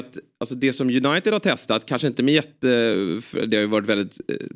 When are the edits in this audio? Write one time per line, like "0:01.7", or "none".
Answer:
none